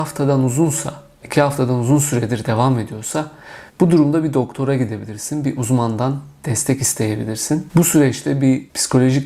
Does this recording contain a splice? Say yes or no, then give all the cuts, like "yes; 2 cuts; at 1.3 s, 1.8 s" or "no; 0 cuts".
yes; 1 cut; at 3.7 s